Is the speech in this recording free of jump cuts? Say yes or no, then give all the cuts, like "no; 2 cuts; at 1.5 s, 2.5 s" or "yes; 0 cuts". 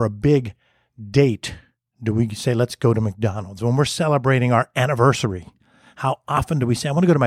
yes; 0 cuts